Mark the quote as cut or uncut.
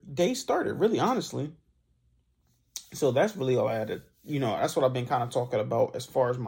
uncut